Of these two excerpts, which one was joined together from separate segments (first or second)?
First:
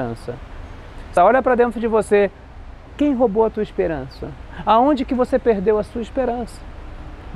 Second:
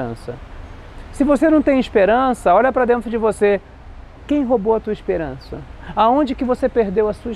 first